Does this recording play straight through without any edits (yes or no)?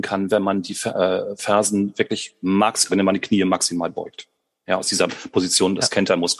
no